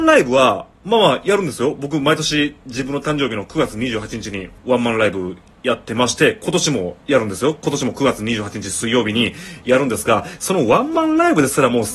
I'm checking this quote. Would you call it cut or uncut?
cut